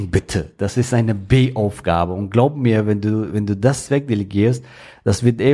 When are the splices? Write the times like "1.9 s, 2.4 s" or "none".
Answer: none